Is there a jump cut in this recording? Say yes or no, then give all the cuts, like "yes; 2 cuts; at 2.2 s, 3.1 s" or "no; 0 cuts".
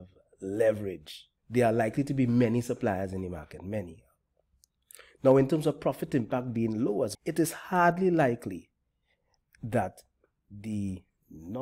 yes; 2 cuts; at 1.4 s, 7.1 s